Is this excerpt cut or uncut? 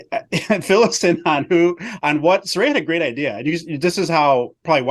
uncut